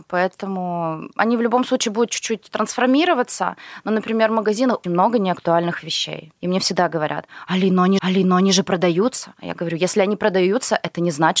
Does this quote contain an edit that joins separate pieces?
yes; 4 cuts; at 4.8 s, 6.4 s, 8.0 s, 9.3 s

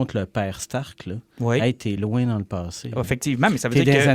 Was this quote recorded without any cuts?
yes; 0 cuts

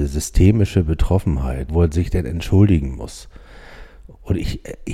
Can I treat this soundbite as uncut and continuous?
no; 1 cut; at 1.7 s

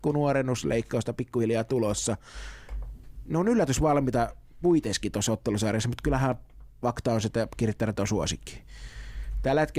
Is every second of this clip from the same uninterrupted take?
yes; 0 cuts

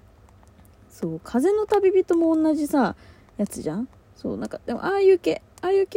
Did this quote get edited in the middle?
no; 0 cuts

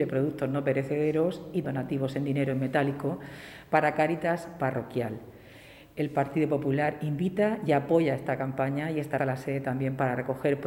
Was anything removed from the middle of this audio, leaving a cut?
yes; 2 cuts; at 1.6 s, 9.2 s

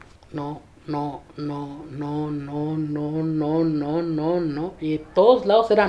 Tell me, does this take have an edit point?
no; 0 cuts

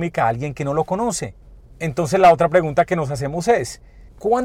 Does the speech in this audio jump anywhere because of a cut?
no; 0 cuts

